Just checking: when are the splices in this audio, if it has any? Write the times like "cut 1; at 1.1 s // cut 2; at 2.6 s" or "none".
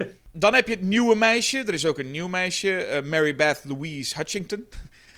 none